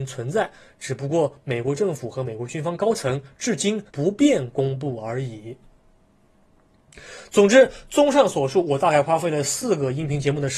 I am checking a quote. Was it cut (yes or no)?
yes